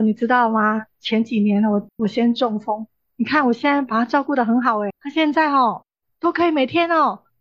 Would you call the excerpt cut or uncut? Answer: cut